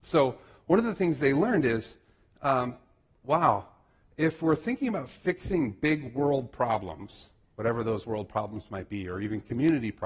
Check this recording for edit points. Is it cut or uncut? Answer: uncut